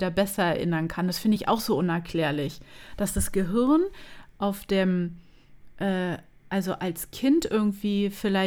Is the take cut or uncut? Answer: uncut